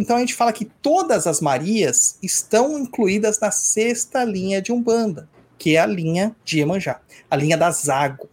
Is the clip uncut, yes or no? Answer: no